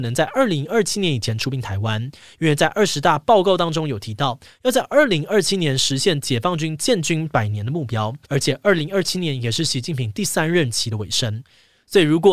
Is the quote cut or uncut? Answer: cut